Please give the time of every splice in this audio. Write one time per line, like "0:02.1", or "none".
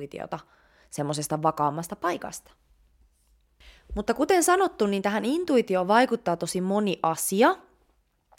none

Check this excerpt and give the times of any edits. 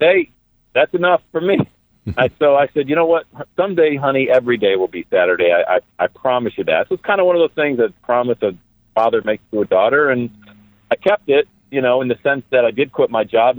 none

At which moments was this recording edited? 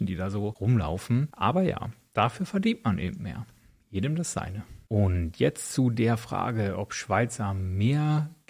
none

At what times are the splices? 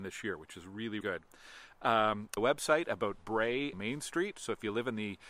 0:01.0
0:02.4
0:03.7

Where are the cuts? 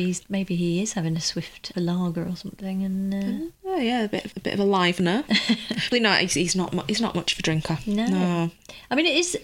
0:01.7
0:04.3
0:05.9

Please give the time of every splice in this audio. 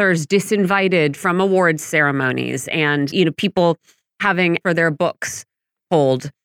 0:03.1
0:04.6

